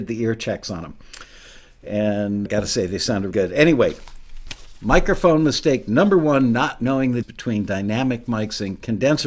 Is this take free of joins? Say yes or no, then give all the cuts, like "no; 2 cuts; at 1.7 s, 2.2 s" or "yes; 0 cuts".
no; 3 cuts; at 2.5 s, 3.3 s, 7.2 s